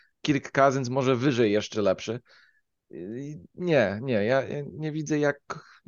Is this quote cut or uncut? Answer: cut